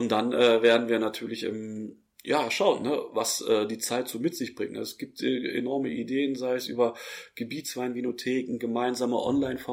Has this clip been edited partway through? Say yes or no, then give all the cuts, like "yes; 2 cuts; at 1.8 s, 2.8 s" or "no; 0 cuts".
no; 0 cuts